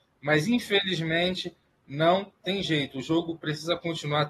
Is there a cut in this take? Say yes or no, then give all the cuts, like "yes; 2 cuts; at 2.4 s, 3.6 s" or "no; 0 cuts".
no; 0 cuts